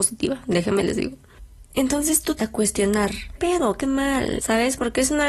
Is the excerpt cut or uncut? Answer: cut